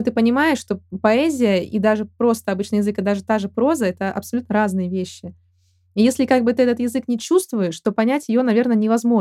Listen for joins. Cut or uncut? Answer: uncut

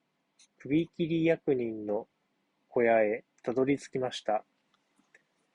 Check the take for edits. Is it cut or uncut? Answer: uncut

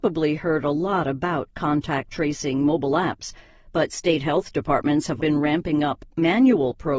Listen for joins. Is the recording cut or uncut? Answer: cut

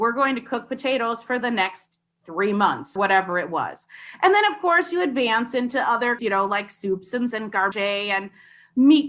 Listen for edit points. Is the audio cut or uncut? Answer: cut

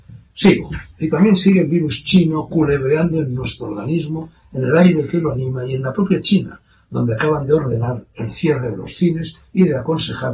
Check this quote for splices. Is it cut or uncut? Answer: uncut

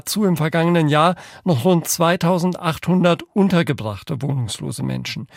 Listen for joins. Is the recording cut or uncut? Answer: uncut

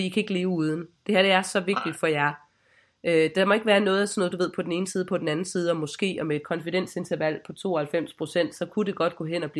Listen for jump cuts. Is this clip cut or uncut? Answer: uncut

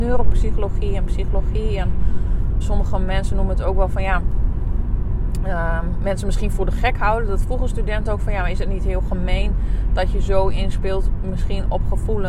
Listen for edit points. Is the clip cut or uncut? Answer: cut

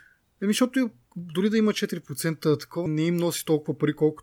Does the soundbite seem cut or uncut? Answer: cut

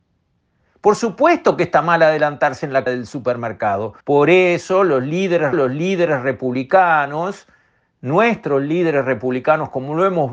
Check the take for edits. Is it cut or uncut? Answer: cut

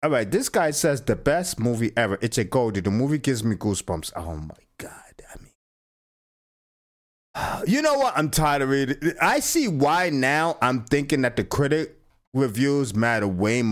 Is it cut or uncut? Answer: uncut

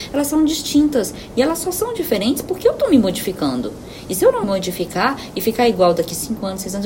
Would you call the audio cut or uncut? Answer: cut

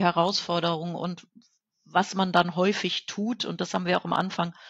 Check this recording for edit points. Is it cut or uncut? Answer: uncut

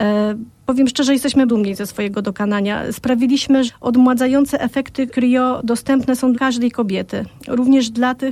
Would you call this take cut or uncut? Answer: cut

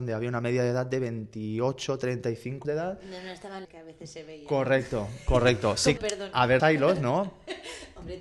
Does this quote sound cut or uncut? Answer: cut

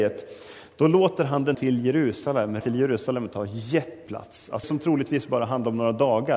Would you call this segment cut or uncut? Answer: cut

